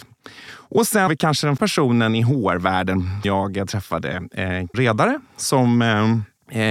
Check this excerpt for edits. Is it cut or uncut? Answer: cut